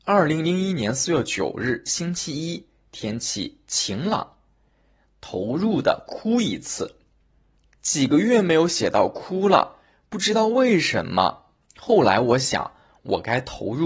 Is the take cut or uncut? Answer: cut